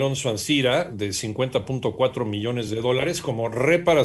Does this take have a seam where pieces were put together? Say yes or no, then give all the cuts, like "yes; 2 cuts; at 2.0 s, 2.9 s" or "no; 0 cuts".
no; 0 cuts